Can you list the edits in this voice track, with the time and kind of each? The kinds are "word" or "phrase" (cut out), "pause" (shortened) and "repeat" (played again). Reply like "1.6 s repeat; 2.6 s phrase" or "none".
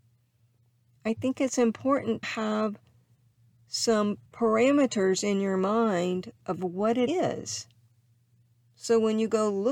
2.2 s word; 4.3 s pause; 7.1 s word